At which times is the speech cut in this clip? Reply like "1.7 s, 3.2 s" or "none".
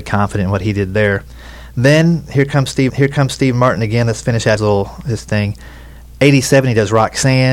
2.9 s, 4.6 s

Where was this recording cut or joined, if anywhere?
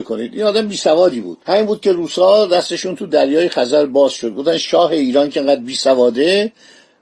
1.4 s

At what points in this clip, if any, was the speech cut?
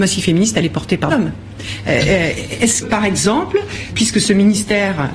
1.1 s, 2.8 s, 3.9 s

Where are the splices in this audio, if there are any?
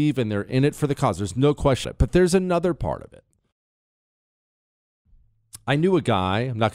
1.8 s

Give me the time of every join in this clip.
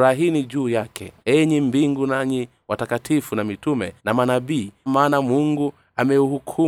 1.2 s, 4.0 s, 4.9 s

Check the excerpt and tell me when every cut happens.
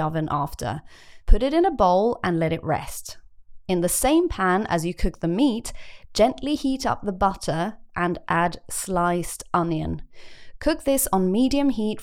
none

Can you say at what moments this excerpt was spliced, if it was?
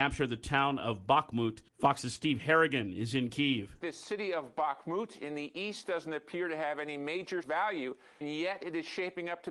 1.7 s, 7.4 s, 8.2 s

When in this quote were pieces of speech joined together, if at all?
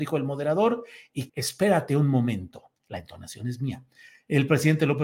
1.3 s, 2.8 s

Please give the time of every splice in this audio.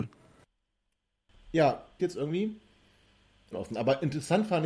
2.0 s, 3.5 s

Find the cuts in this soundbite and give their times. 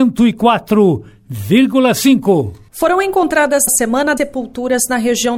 3.7 s, 4.2 s

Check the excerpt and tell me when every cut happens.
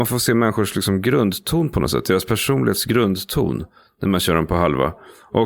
none

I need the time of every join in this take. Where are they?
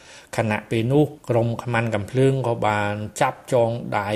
1.2 s

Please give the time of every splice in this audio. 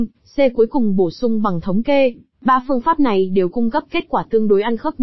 2.3 s

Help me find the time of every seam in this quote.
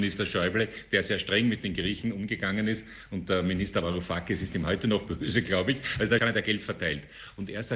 6.2 s

